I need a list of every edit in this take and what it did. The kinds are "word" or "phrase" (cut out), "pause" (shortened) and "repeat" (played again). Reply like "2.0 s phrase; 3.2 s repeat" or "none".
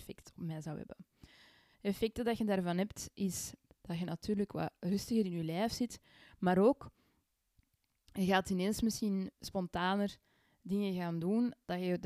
9.3 s word